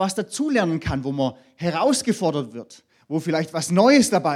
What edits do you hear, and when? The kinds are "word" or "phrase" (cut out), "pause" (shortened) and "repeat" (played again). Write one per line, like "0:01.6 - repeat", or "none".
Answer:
none

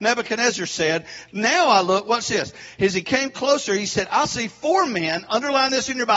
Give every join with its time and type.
none

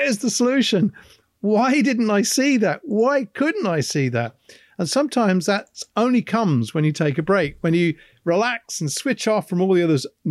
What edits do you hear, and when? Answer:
none

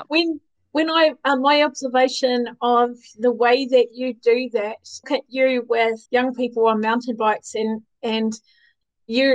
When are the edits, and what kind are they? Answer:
0:05.0 - phrase
0:06.1 - pause

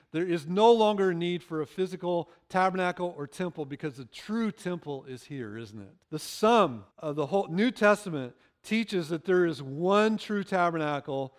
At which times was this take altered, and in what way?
0:06.0 - pause
0:06.9 - pause

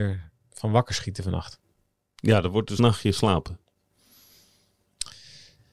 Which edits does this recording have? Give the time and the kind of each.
0:02.8 - word

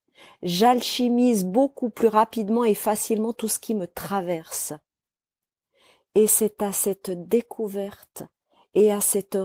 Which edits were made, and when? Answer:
none

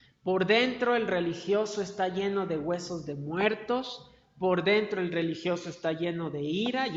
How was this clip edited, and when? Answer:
none

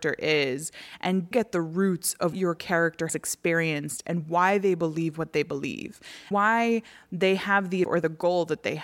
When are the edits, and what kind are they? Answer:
0:01.3 - word
0:02.3 - word
0:03.1 - word
0:06.3 - word
0:07.8 - word

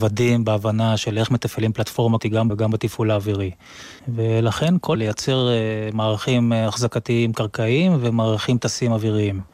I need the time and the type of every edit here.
0:02.2 - word
0:02.5 - word
0:04.0 - pause
0:04.9 - phrase

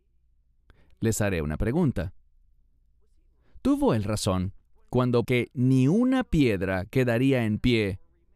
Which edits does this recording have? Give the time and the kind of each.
0:05.2 - word

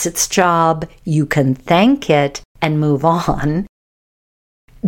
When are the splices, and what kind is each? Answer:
0:02.5 - pause

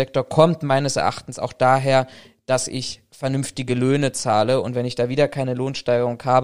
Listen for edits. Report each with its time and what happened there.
none

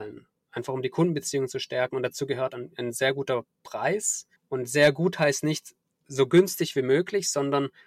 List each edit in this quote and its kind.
0:04.4 - pause
0:05.9 - pause

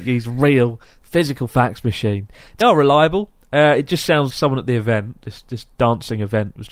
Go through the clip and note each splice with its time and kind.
0:02.6 - phrase
0:04.3 - word

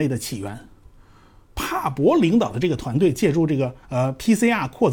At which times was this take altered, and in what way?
0:03.8 - pause

